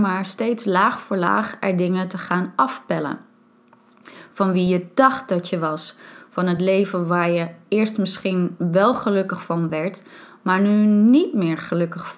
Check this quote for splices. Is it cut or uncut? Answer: uncut